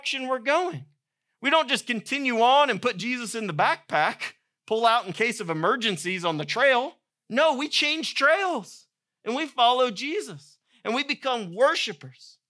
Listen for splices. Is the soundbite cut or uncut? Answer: cut